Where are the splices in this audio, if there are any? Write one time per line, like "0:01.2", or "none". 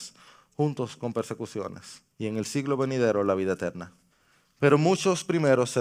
0:02.1
0:04.1